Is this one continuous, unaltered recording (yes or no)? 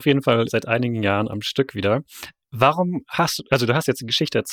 yes